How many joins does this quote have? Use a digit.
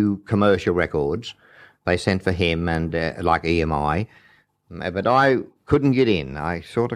0